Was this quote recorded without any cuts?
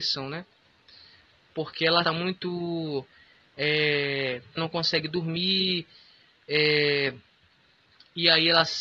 no; 2 cuts; at 2.0 s, 4.6 s

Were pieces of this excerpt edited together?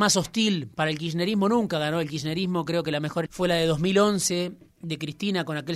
yes; 1 cut; at 3.3 s

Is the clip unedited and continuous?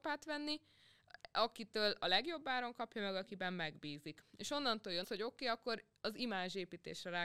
no; 1 cut; at 5.0 s

